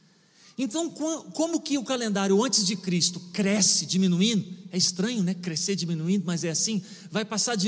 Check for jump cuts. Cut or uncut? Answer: uncut